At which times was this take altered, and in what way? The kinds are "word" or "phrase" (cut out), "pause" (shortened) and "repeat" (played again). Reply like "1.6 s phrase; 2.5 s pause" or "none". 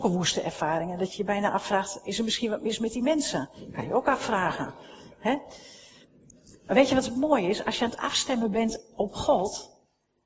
none